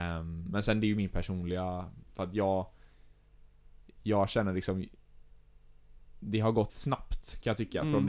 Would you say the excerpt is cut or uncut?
cut